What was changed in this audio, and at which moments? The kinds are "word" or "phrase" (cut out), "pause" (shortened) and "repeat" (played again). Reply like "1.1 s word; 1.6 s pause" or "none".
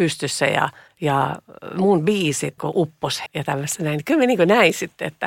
2.6 s word; 3.3 s phrase